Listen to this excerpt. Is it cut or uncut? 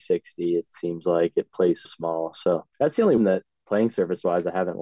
cut